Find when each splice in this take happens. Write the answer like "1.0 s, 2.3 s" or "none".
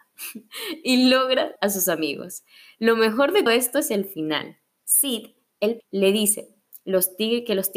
1.6 s, 3.5 s, 5.8 s